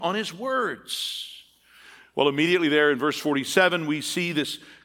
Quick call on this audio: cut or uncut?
uncut